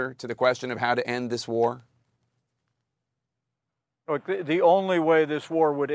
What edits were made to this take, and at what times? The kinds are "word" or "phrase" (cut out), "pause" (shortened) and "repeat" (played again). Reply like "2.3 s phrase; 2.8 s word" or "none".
none